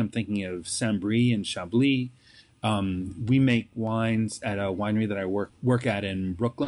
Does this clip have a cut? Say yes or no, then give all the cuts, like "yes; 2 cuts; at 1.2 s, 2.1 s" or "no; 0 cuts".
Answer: yes; 1 cut; at 5.5 s